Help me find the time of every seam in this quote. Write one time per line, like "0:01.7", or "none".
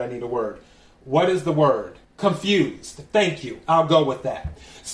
0:02.0